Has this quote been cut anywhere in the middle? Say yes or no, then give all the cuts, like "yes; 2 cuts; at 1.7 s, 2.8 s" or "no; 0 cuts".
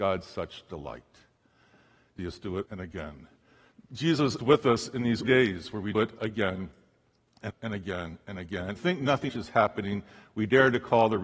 yes; 8 cuts; at 2.2 s, 2.7 s, 4.4 s, 5.2 s, 5.9 s, 7.5 s, 8.8 s, 9.3 s